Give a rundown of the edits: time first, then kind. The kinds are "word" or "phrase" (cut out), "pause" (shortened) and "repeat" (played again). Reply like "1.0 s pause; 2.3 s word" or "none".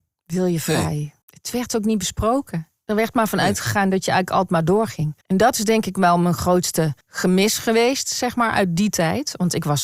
1.2 s pause; 5.2 s pause; 7.0 s pause

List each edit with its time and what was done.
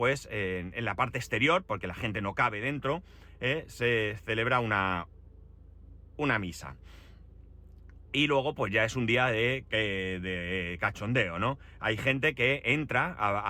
none

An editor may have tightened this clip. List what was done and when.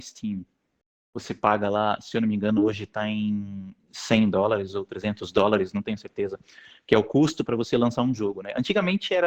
none

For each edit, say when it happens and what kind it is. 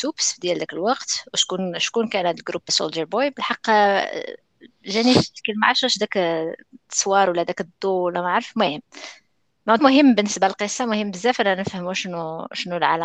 2.7 s phrase; 6.8 s pause; 9.8 s word

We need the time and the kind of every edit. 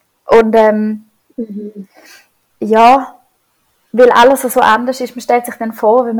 none

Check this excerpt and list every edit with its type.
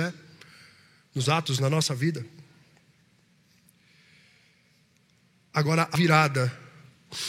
1.2 s word; 5.9 s word

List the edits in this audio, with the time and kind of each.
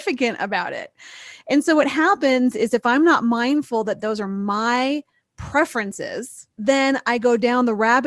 6.5 s pause

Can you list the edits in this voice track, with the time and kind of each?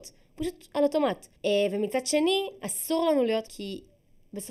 1.3 s pause; 3.5 s word

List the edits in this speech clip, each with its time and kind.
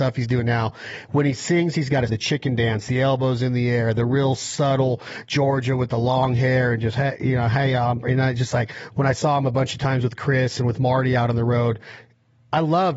2.1 s word

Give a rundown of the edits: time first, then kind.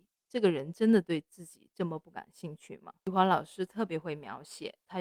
3.0 s pause

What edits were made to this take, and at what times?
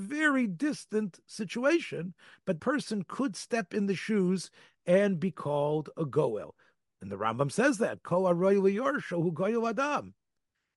2.6 s word

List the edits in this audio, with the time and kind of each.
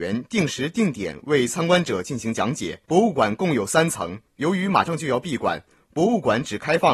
2.9 s pause; 4.3 s pause

